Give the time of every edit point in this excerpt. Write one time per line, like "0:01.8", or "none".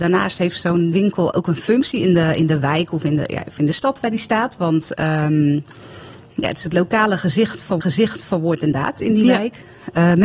0:00.9
0:07.8